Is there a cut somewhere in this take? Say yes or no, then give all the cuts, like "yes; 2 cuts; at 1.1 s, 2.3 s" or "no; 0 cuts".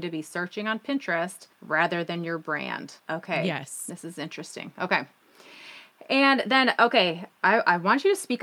yes; 2 cuts; at 1.5 s, 3.0 s